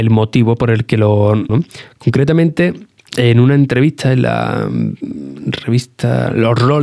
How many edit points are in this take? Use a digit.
1